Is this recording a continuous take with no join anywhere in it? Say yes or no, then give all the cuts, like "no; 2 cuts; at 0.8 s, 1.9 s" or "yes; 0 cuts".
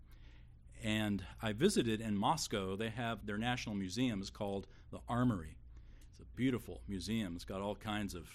no; 2 cuts; at 3.2 s, 6.3 s